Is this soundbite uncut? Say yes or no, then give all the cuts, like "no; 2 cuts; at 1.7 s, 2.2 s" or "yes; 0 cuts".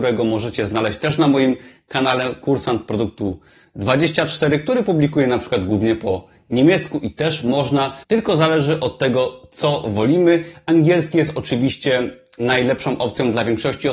no; 1 cut; at 8.0 s